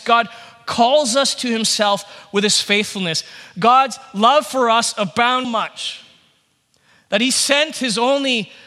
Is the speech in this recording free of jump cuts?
no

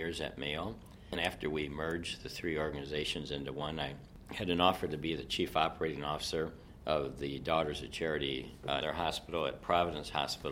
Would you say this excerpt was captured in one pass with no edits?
no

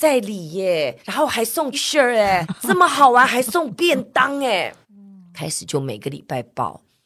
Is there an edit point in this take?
yes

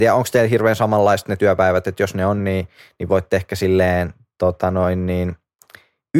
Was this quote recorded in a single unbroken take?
yes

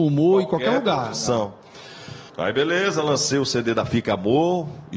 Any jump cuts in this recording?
yes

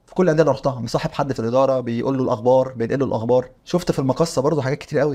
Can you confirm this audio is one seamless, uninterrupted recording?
no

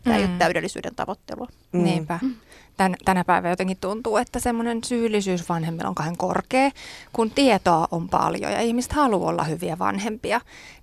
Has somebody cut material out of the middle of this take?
no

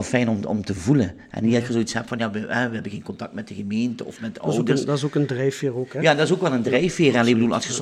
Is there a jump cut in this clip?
no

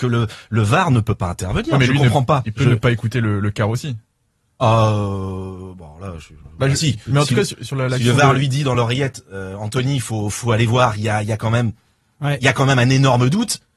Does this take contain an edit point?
no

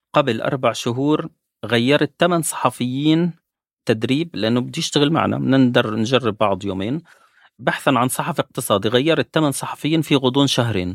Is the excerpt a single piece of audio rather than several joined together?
yes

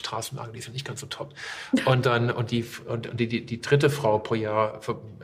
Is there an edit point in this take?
no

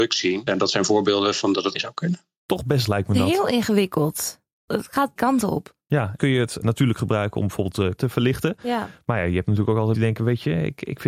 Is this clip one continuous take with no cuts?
no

